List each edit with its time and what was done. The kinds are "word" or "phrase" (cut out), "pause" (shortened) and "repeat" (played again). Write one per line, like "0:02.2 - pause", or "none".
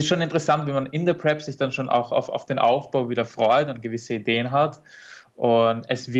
none